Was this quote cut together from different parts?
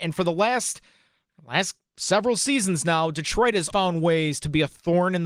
yes; 1 cut; at 3.7 s

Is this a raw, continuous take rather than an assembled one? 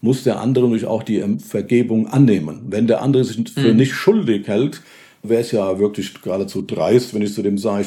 yes; 0 cuts

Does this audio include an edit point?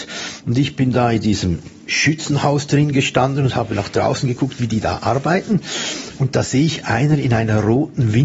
no; 0 cuts

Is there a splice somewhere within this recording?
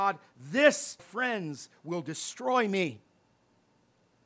yes; 1 cut; at 1.0 s

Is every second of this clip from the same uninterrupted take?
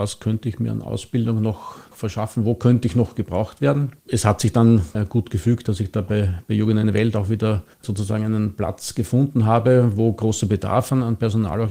no; 2 cuts; at 4.0 s, 7.7 s

